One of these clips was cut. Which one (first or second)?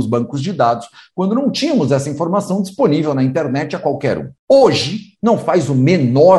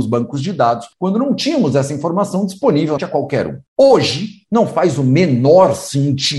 second